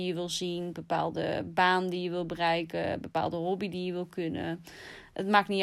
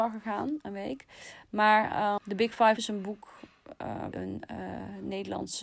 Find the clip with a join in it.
second; 3 cuts; at 2.2 s, 2.8 s, 4.1 s

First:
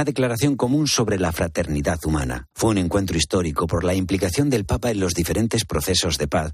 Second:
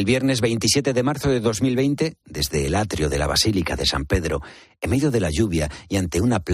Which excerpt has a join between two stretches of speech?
first; 1 cut; at 2.5 s

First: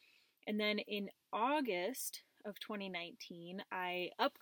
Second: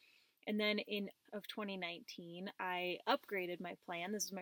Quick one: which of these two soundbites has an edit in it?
second; 1 cut; at 1.3 s

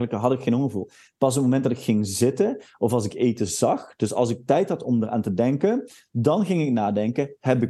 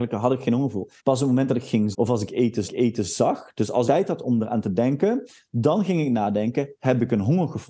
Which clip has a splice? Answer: second; 4 cuts; at 1.0 s, 1.9 s, 2.7 s, 3.9 s

